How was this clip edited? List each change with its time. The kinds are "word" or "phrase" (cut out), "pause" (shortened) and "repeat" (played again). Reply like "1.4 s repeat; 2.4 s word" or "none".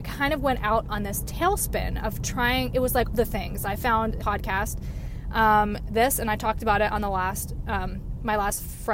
3.1 s word; 4.2 s word; 5.9 s word